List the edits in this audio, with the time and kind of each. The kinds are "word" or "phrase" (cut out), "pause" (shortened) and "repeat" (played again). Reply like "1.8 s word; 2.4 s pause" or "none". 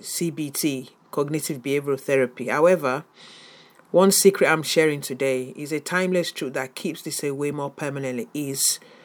none